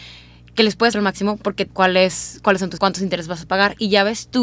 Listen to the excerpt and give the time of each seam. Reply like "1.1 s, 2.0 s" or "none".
0.9 s, 1.7 s, 2.8 s